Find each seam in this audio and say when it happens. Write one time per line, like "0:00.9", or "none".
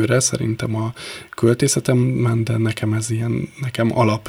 none